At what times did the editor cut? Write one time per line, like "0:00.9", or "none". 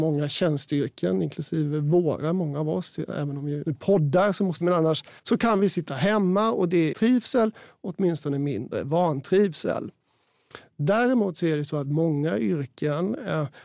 0:03.6
0:04.6
0:05.2
0:06.9